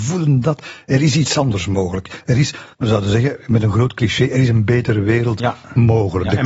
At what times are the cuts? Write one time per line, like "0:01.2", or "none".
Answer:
0:02.7